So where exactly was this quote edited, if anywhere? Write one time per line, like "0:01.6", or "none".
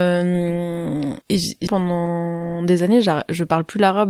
0:01.2
0:01.7